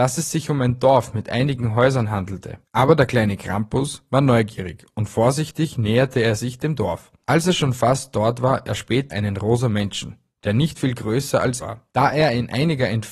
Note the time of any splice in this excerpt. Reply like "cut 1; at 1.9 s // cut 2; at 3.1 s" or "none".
cut 1; at 2.6 s // cut 2; at 7.2 s // cut 3; at 9.1 s // cut 4; at 11.6 s // cut 5; at 11.9 s